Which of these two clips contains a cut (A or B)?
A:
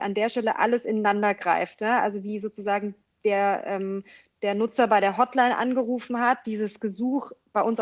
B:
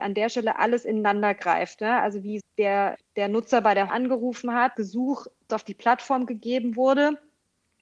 B